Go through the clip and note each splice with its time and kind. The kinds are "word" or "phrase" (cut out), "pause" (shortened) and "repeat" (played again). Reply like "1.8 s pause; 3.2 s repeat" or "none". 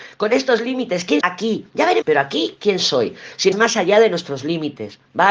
1.2 s word; 2.0 s word; 3.5 s word